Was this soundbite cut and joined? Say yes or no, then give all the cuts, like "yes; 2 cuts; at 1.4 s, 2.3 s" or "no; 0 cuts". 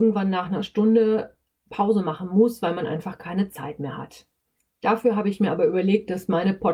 no; 0 cuts